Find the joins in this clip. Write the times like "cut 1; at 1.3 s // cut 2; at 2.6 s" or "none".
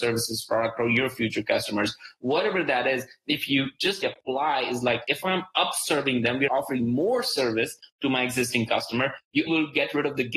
cut 1; at 4.0 s // cut 2; at 6.5 s // cut 3; at 9.5 s